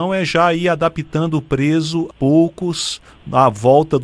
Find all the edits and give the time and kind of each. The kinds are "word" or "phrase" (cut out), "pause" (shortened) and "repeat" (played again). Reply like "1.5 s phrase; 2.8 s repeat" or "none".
2.1 s word